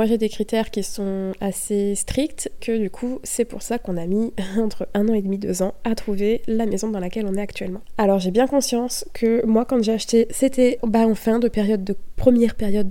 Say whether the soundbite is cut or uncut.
cut